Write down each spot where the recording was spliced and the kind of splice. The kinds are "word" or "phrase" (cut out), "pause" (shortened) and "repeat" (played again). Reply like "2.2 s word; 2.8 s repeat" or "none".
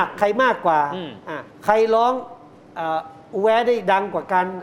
1.5 s pause

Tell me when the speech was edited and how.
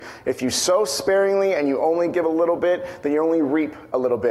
none

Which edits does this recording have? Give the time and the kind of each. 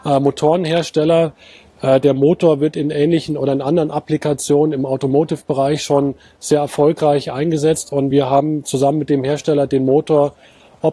none

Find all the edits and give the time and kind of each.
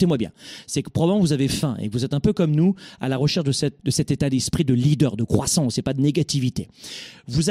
3.8 s word

